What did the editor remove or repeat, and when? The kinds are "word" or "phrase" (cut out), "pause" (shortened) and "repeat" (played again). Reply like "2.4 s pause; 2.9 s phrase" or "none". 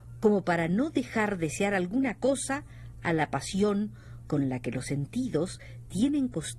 none